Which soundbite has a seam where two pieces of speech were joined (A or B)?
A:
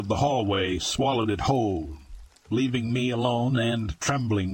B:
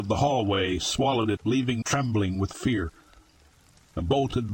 B